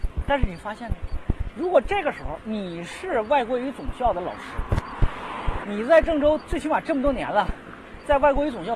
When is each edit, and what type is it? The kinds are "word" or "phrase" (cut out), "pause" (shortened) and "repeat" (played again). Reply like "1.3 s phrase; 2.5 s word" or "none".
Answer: 5.6 s phrase